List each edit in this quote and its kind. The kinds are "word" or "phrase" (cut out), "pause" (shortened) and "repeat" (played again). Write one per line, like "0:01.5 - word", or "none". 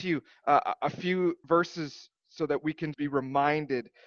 0:01.4 - pause
0:02.9 - word